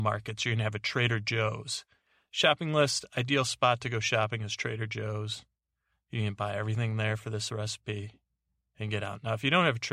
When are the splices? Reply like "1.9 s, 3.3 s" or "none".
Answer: none